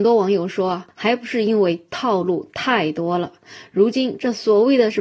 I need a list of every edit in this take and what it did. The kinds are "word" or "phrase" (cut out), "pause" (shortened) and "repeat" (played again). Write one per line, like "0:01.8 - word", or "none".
0:00.9 - pause

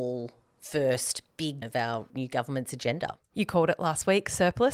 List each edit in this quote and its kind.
0:01.6 - word
0:02.1 - word

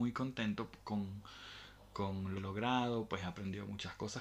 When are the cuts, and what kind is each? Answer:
0:02.4 - phrase

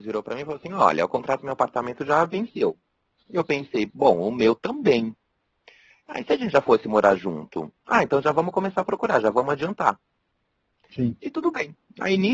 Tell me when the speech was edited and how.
none

